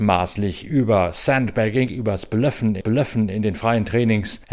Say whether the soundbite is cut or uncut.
cut